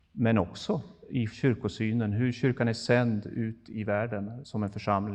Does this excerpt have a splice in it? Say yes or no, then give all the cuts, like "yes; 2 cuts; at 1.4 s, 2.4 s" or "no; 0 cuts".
no; 0 cuts